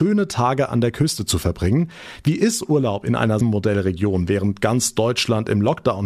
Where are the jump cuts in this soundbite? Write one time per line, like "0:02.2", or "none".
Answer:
0:03.4